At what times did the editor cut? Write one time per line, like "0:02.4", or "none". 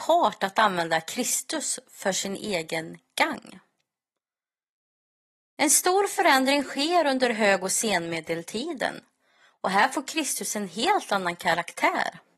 none